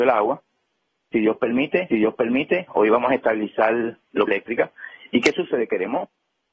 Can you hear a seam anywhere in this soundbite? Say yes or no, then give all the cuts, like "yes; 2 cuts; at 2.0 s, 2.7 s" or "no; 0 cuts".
yes; 2 cuts; at 1.9 s, 4.3 s